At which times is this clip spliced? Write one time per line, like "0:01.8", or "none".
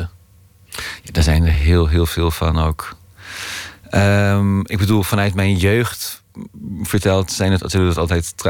none

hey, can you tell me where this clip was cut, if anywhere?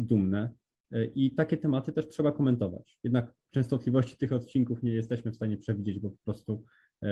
0:03.4

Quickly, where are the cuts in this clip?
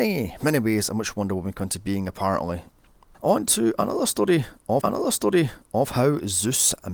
0:04.8

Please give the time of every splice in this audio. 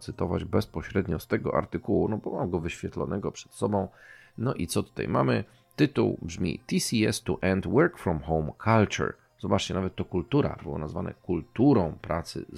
none

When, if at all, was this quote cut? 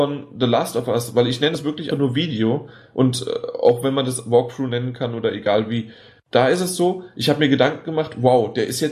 0:01.9

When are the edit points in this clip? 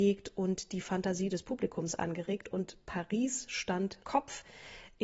0:04.0

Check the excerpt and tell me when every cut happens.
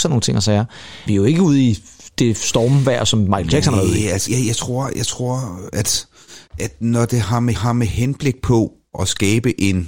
0:01.1
0:04.3
0:06.5
0:07.5
0:08.9

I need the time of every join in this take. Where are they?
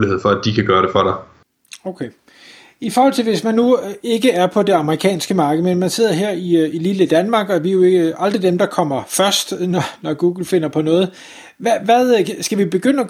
none

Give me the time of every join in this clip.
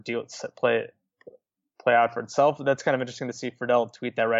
none

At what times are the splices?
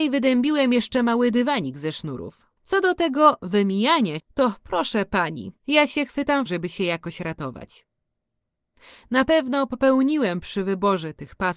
0:02.6
0:04.2
0:05.6
0:06.5

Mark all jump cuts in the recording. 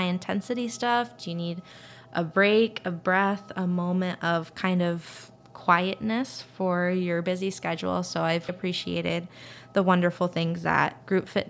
0:08.5

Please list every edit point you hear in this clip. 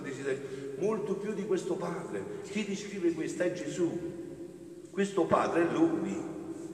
none

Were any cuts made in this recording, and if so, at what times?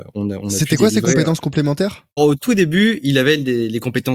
0:02.2

